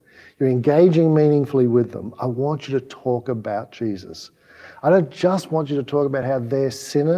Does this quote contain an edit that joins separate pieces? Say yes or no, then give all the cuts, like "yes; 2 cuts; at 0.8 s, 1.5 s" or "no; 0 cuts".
no; 0 cuts